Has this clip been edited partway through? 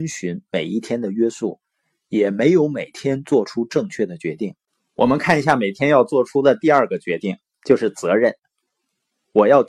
no; 0 cuts

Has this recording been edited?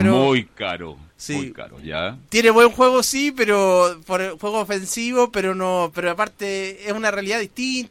yes; 1 cut; at 1.1 s

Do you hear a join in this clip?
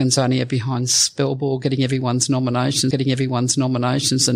yes; 1 cut; at 2.9 s

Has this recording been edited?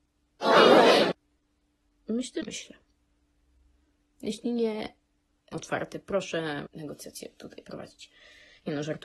yes; 3 cuts; at 2.4 s, 5.5 s, 6.7 s

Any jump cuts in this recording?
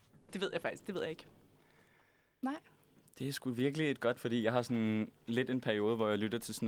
yes; 1 cut; at 4.1 s

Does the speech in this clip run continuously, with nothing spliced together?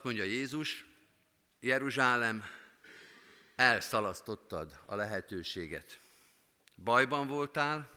yes; 0 cuts

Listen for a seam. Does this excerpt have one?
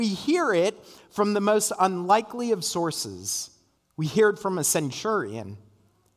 yes; 1 cut; at 3.8 s

